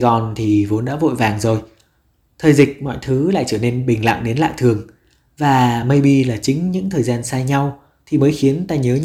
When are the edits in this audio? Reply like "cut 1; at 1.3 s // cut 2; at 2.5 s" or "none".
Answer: none